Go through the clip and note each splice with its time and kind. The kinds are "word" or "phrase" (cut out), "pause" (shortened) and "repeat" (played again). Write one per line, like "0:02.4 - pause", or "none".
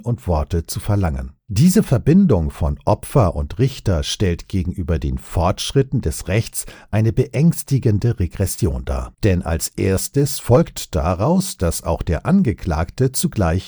0:01.4 - pause
0:09.1 - pause